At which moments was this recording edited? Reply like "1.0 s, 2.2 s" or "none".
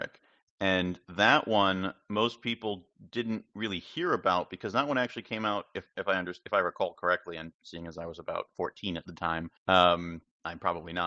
9.6 s